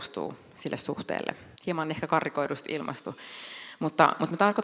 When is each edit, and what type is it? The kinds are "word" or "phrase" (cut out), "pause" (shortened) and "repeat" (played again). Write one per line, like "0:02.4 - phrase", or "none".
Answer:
0:01.5 - pause